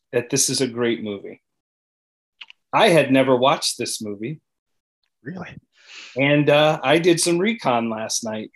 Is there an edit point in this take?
no; 0 cuts

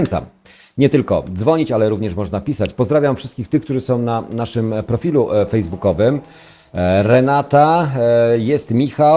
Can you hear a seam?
no; 0 cuts

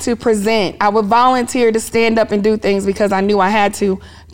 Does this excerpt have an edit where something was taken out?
no; 0 cuts

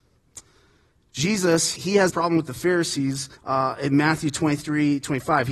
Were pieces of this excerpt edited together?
yes; 3 cuts; at 1.8 s, 2.1 s, 3.4 s

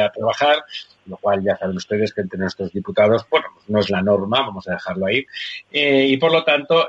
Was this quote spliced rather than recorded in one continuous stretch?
no; 0 cuts

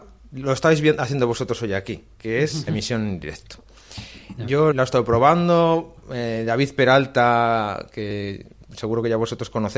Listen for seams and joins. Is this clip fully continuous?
no; 3 cuts; at 2.7 s, 4.7 s, 6.0 s

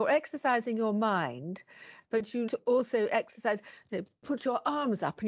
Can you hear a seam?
yes; 1 cut; at 2.5 s

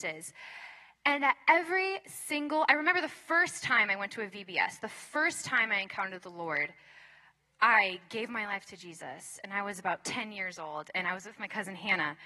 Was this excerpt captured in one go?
yes; 0 cuts

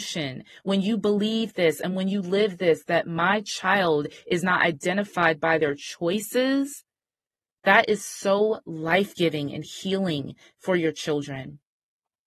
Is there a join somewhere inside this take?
no; 0 cuts

